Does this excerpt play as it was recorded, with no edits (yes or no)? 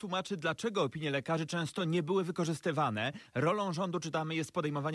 yes